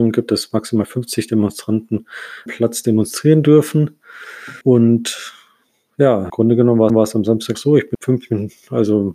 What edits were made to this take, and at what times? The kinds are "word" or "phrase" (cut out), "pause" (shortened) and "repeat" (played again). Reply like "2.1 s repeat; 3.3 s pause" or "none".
2.5 s phrase; 4.6 s pause; 6.3 s word; 6.9 s repeat; 7.5 s word; 7.9 s word